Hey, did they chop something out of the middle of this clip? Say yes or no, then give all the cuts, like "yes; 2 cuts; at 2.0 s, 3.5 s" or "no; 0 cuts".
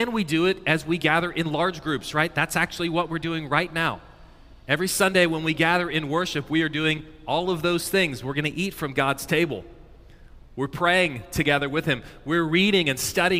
no; 0 cuts